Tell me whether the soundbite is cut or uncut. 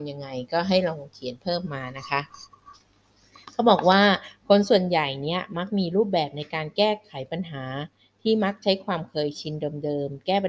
uncut